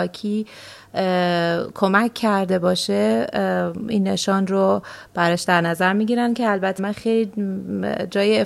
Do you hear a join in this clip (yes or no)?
yes